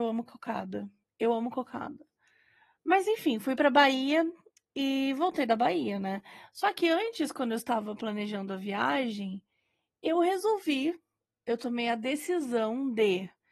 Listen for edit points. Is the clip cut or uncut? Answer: uncut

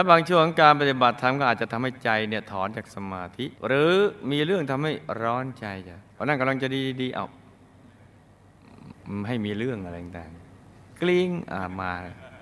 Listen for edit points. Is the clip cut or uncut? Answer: cut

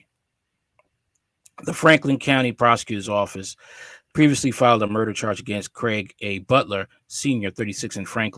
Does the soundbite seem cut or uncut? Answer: uncut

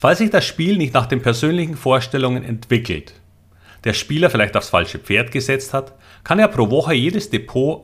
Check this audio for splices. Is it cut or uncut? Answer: uncut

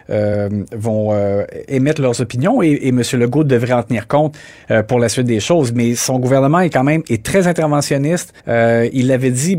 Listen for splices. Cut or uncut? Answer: cut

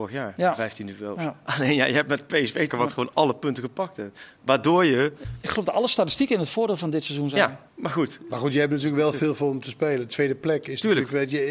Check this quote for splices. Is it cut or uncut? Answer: cut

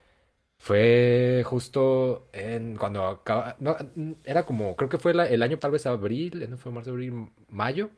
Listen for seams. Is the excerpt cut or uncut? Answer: cut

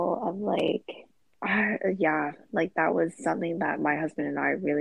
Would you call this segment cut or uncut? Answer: cut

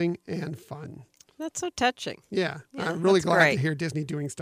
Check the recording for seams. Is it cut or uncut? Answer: uncut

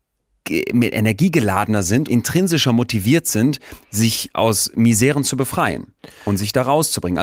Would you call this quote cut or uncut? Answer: cut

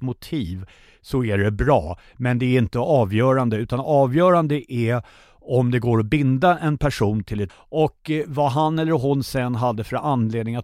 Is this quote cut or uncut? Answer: cut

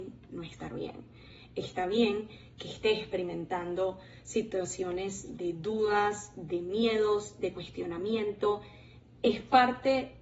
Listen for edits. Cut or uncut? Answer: uncut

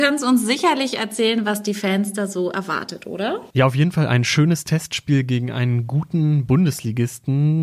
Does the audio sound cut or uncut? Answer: cut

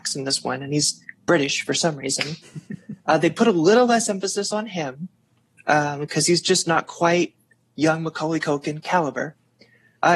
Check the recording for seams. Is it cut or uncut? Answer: uncut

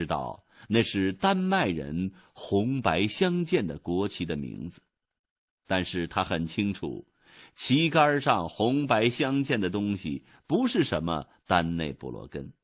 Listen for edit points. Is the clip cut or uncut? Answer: uncut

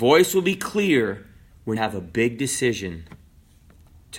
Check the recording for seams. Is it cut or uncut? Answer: cut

